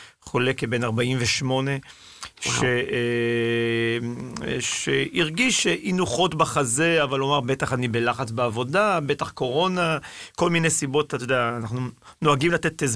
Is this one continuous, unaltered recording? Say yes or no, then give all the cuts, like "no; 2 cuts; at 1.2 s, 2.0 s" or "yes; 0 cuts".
yes; 0 cuts